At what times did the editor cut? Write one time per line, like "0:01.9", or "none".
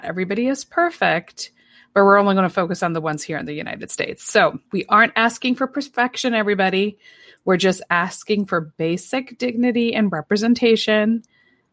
0:04.7